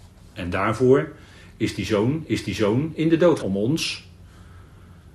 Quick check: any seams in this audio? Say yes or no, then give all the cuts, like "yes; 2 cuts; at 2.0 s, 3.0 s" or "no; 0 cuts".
yes; 2 cuts; at 2.3 s, 3.4 s